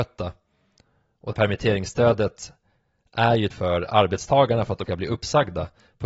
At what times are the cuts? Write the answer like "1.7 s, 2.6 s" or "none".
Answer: 1.3 s, 3.5 s, 4.8 s